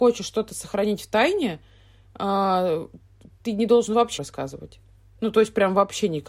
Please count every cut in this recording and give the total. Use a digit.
1